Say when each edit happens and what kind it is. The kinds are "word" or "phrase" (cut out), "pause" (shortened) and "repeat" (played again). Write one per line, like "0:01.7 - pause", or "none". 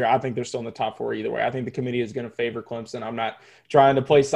none